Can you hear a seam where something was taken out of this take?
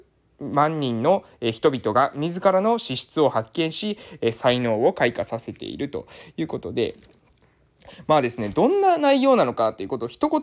no; 0 cuts

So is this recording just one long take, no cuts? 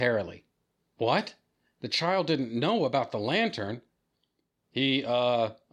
yes; 0 cuts

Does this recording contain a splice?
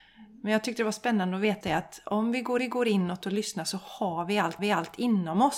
yes; 3 cuts; at 1.6 s, 2.6 s, 4.6 s

